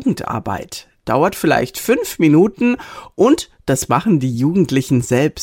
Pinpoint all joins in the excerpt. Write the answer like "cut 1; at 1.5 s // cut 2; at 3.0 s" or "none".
none